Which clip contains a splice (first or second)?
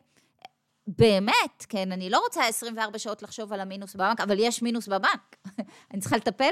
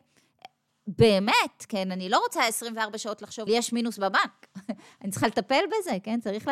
second